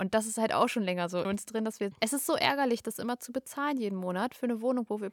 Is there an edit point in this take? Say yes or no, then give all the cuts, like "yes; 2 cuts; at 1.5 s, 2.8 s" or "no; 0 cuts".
yes; 2 cuts; at 1.2 s, 1.9 s